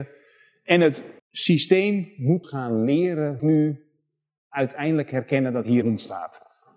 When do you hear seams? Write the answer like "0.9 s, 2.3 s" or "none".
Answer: 1.2 s, 2.4 s, 3.4 s, 5.8 s